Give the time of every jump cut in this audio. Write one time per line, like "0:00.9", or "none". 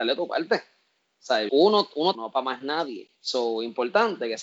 0:01.5
0:02.1
0:03.1